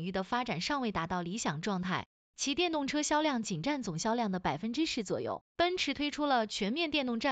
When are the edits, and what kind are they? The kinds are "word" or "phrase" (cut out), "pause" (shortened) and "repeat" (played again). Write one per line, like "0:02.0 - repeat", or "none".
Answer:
0:05.5 - pause